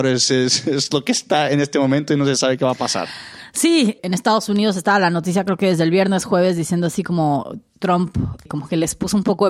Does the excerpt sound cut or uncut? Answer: uncut